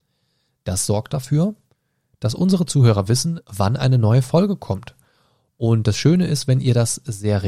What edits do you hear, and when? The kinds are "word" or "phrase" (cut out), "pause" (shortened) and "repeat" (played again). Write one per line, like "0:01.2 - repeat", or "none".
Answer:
none